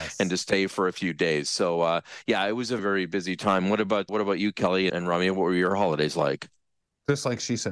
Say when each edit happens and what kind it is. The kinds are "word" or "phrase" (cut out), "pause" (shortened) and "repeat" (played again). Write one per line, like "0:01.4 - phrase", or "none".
0:02.8 - word
0:04.1 - word
0:04.9 - word